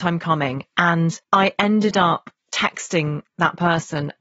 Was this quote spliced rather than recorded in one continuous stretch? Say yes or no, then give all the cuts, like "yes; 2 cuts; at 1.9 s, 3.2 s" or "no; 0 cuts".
yes; 1 cut; at 1.2 s